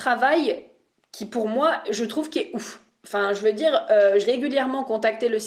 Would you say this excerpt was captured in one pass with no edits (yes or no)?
no